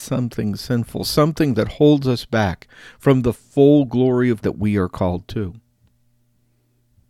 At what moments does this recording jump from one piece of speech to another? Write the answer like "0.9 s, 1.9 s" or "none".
4.4 s